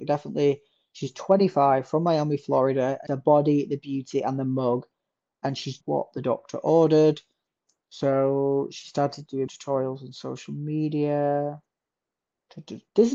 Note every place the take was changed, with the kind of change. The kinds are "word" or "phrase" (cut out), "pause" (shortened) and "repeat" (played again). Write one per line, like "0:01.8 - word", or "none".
0:03.1 - word
0:05.8 - word
0:09.5 - word